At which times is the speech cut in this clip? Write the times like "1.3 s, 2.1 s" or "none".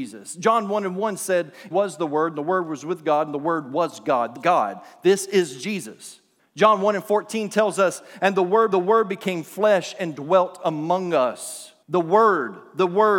1.7 s, 4.4 s, 6.4 s, 8.7 s, 11.8 s